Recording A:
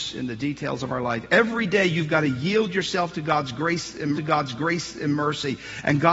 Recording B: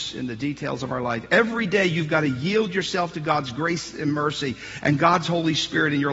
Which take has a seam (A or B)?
A